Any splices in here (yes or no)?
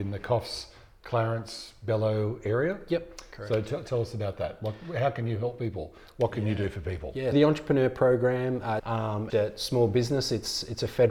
yes